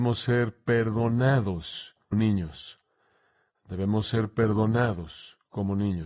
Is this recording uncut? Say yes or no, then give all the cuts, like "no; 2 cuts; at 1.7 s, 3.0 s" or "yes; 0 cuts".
no; 1 cut; at 2.1 s